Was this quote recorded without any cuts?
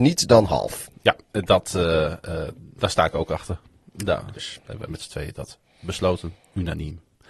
yes; 0 cuts

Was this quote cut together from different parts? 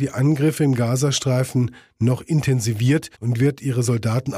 yes; 1 cut; at 3.1 s

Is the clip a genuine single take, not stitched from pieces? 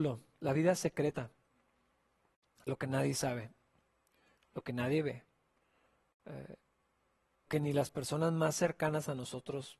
no; 1 cut; at 7.5 s

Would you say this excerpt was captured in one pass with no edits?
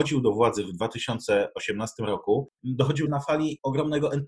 no; 1 cut; at 3.1 s

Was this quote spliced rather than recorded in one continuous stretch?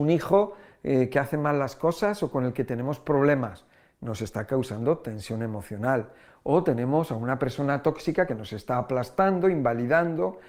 yes; 1 cut; at 8.3 s

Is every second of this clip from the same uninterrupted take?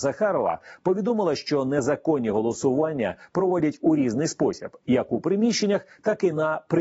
yes; 0 cuts

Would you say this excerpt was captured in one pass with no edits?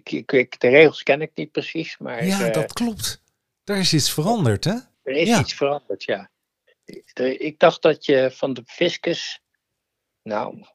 no; 1 cut; at 4.9 s

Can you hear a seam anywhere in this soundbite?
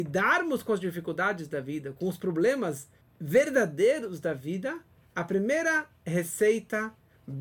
no; 0 cuts

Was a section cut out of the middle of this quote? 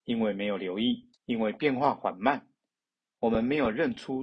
yes; 1 cut; at 1.1 s

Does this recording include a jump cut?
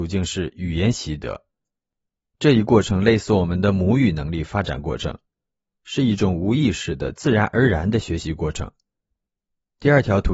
no; 0 cuts

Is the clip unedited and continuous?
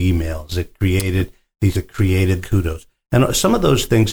no; 2 cuts; at 1.7 s, 2.4 s

